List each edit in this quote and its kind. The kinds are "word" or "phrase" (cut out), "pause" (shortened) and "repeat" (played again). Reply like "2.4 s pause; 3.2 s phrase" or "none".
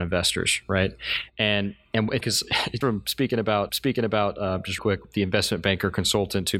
2.2 s word; 2.8 s word; 3.7 s repeat; 4.8 s word